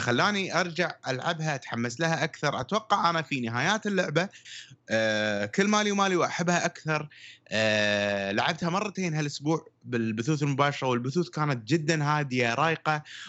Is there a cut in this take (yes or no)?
no